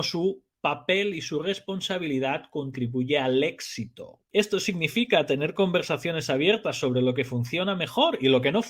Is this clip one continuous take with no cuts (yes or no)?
no